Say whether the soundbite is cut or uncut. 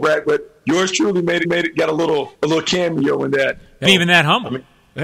cut